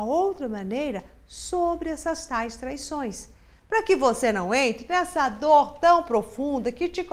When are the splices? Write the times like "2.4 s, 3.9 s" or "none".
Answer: none